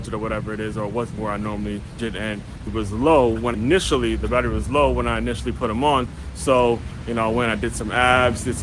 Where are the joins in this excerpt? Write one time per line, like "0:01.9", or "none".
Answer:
0:01.2
0:02.0
0:02.7
0:03.5